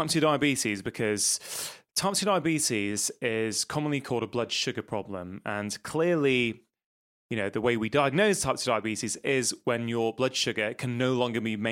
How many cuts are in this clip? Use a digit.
0